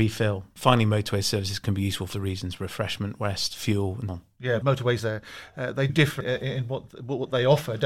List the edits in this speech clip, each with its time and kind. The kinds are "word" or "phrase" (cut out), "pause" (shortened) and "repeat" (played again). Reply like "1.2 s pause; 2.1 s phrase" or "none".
2.1 s word; 4.1 s word; 4.6 s word; 5.0 s word; 5.9 s word; 6.2 s word